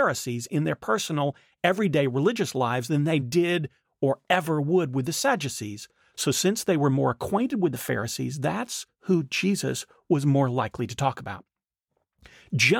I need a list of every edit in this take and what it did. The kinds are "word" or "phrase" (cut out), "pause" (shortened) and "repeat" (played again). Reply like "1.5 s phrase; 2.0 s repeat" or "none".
none